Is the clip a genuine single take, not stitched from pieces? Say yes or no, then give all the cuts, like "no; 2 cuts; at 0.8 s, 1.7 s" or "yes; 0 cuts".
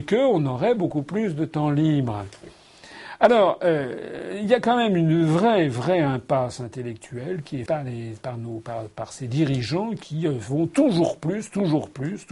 no; 1 cut; at 7.7 s